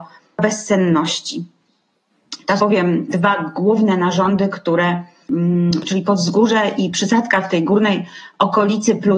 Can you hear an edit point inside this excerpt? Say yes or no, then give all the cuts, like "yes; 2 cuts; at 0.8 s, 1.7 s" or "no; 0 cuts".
yes; 1 cut; at 2.6 s